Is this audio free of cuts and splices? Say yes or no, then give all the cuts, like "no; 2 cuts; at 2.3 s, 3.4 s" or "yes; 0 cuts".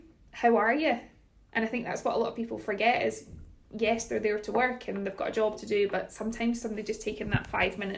yes; 0 cuts